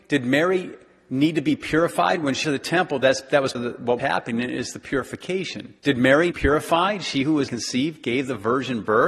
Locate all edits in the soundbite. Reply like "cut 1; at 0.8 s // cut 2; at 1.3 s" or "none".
cut 1; at 2.4 s // cut 2; at 3.5 s // cut 3; at 4.0 s // cut 4; at 5.8 s // cut 5; at 6.3 s // cut 6; at 7.5 s